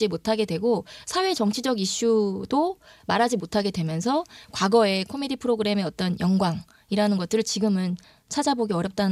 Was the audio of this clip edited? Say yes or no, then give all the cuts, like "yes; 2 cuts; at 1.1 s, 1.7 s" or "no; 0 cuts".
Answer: no; 0 cuts